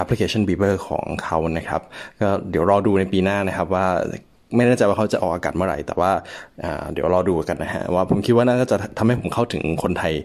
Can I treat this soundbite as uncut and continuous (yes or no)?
yes